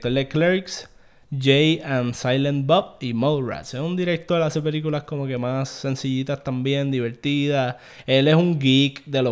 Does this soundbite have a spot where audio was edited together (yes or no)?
no